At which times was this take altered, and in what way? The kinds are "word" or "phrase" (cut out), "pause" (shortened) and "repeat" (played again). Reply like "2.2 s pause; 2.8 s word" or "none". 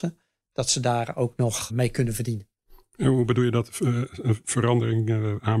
1.7 s word